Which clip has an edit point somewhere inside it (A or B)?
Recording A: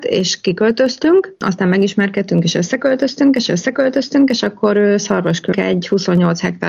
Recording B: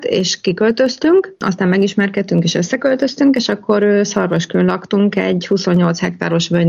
A